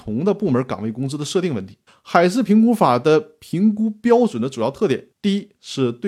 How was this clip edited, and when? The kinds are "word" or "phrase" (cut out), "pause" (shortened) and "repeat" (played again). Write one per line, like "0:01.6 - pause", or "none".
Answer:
0:01.9 - pause
0:05.1 - pause